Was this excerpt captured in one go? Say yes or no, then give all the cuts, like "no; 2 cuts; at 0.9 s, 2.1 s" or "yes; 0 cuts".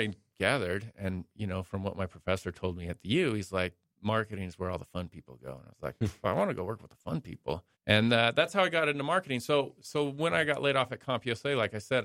no; 1 cut; at 7.7 s